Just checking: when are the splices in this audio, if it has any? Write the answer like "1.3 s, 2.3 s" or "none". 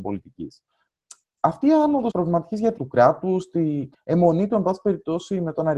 2.1 s, 2.8 s, 3.9 s